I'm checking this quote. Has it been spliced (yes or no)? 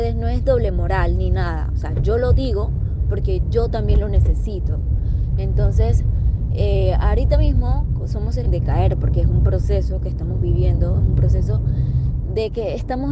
yes